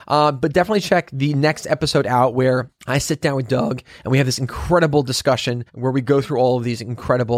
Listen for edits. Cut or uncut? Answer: cut